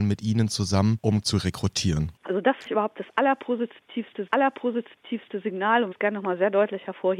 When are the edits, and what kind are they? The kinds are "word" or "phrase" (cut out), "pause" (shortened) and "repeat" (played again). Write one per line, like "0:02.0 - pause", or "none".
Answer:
0:01.2 - phrase
0:02.7 - word
0:04.3 - repeat
0:05.9 - word